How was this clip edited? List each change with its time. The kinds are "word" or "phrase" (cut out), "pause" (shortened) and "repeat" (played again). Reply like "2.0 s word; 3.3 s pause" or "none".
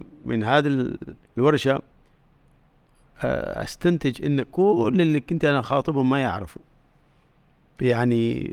1.2 s pause